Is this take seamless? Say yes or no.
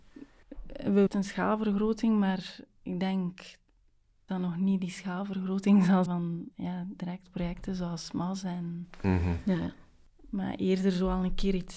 no